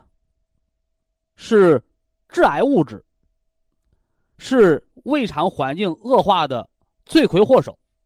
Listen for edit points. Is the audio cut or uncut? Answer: uncut